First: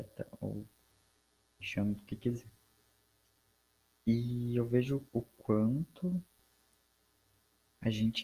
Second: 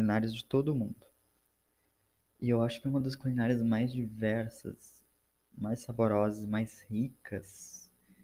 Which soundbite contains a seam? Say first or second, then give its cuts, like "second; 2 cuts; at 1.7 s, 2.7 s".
first; 3 cuts; at 1.6 s, 3.4 s, 5.1 s